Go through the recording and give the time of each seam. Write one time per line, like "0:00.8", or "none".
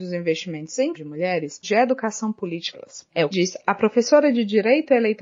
0:00.9
0:01.6
0:02.7
0:03.3